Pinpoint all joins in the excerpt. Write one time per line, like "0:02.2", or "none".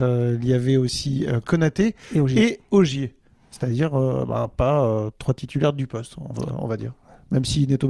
none